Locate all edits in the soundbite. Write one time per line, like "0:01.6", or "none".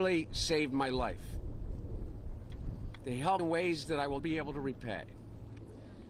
0:03.4
0:04.2